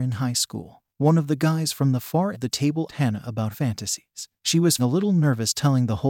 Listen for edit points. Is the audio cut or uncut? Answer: cut